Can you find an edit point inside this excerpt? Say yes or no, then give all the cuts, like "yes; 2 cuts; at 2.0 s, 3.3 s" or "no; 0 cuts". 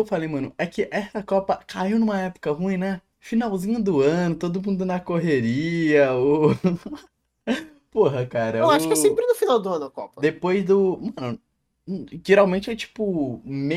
yes; 2 cuts; at 3.1 s, 7.1 s